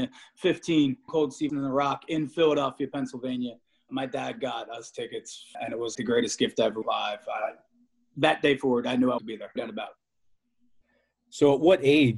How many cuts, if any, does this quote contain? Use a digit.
8